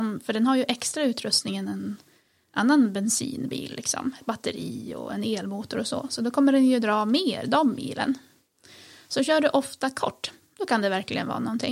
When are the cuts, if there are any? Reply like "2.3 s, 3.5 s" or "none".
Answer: none